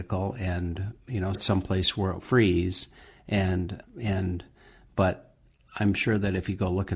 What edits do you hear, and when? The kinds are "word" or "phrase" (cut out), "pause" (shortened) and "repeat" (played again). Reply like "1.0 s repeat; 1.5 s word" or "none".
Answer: 1.3 s word; 2.2 s word; 3.8 s word